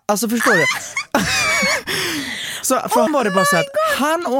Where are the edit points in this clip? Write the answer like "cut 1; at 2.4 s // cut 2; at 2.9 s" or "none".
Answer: cut 1; at 3.1 s

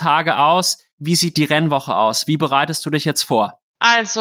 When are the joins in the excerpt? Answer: cut 1; at 0.9 s

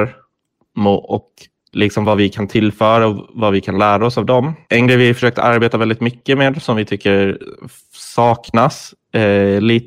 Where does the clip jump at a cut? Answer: cut 1; at 1.6 s // cut 2; at 4.6 s

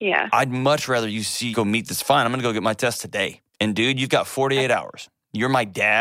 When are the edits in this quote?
cut 1; at 1.5 s // cut 2; at 3.5 s

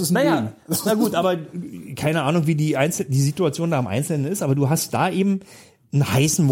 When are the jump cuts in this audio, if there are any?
none

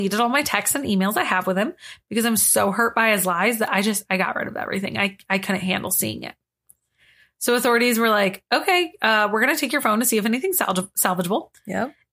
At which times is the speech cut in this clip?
none

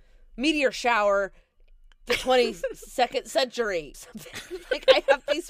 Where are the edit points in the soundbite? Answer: cut 1; at 2.1 s // cut 2; at 3.9 s

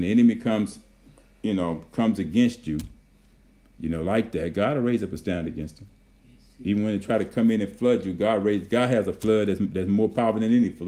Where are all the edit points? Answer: none

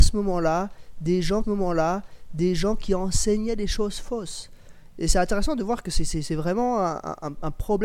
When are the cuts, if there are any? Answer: cut 1; at 1.4 s

